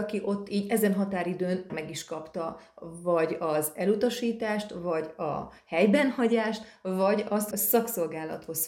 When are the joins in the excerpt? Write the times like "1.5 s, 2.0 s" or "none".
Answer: 1.7 s, 7.5 s